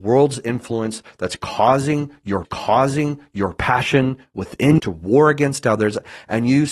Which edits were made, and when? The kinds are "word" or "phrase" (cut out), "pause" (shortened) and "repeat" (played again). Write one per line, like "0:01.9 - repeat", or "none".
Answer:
0:02.4 - repeat
0:04.8 - word